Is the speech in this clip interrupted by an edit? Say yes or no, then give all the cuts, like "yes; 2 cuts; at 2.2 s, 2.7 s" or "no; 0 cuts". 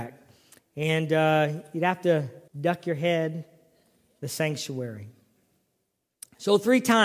yes; 2 cuts; at 2.5 s, 4.2 s